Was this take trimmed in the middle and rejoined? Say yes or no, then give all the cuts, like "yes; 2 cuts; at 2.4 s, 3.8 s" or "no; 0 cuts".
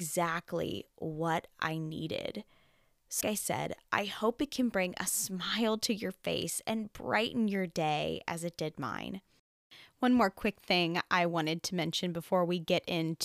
yes; 1 cut; at 3.2 s